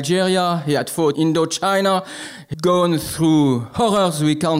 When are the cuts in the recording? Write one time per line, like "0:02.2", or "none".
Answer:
0:01.1
0:02.5